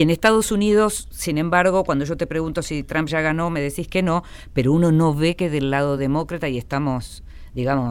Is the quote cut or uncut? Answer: uncut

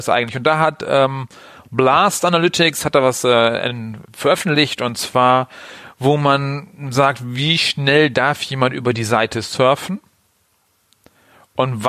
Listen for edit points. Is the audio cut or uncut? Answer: uncut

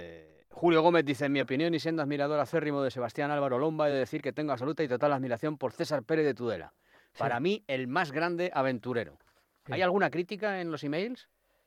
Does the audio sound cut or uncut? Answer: uncut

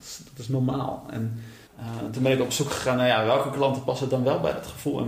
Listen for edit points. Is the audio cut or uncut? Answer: cut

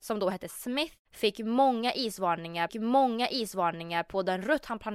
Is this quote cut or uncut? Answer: cut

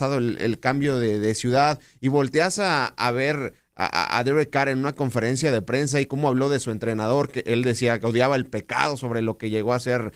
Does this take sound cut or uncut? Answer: uncut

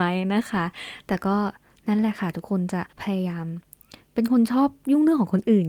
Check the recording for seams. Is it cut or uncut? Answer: cut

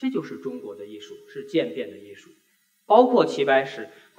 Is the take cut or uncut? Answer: uncut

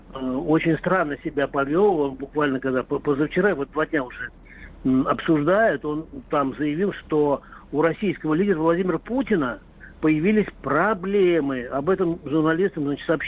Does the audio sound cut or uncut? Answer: uncut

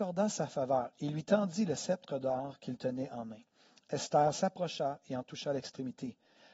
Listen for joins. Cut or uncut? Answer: uncut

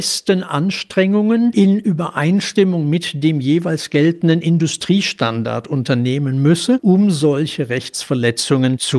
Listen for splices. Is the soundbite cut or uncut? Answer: uncut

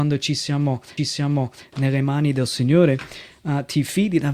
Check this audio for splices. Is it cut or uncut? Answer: cut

